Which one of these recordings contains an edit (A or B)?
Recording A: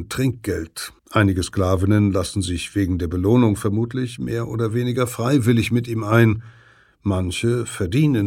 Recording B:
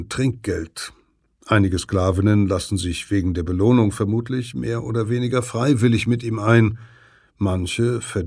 A